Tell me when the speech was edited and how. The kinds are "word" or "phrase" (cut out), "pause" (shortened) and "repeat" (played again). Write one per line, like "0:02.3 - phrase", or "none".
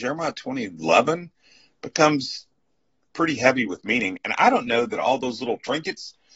none

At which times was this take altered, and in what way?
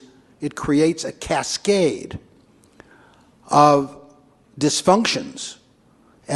none

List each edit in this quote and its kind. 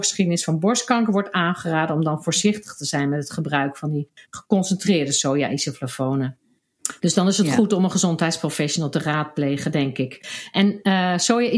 none

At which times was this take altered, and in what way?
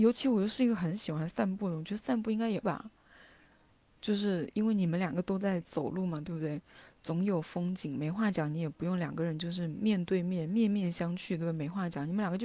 0:02.6 - word

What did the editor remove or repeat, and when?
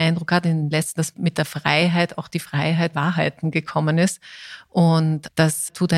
0:01.0 - word
0:02.9 - phrase

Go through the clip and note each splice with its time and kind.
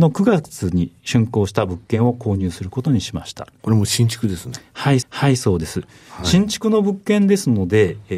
0:05.0 - repeat

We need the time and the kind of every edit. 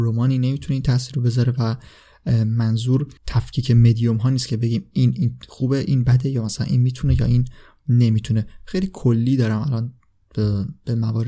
0:03.2 - pause

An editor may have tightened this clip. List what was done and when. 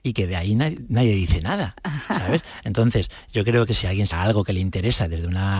0:03.7 - word
0:04.1 - word

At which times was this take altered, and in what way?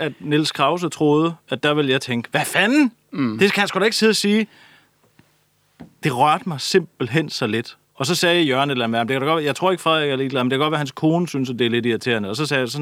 0:07.8 - pause

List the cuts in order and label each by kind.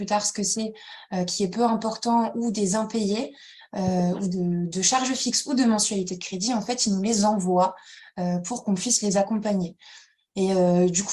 none

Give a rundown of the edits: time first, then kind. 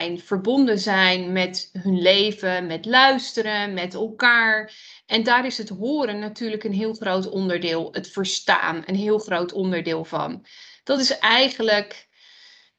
none

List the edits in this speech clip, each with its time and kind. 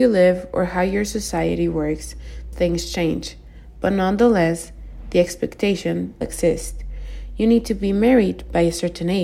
0:02.5 - word
0:06.2 - word

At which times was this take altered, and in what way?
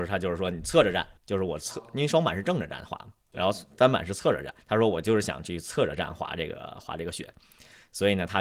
0:01.2 - pause
0:04.6 - pause

